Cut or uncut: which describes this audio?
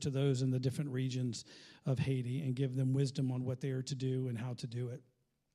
uncut